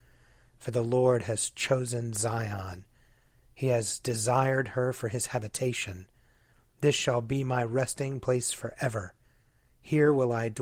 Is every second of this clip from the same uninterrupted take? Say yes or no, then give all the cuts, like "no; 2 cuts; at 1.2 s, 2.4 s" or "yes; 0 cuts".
yes; 0 cuts